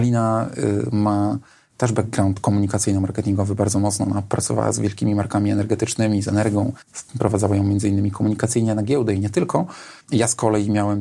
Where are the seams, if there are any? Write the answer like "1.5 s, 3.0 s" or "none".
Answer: 6.8 s, 10.0 s